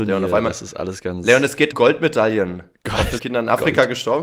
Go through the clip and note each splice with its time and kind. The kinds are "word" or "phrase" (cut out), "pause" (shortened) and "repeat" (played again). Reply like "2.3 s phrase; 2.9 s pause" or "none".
1.7 s word; 3.2 s word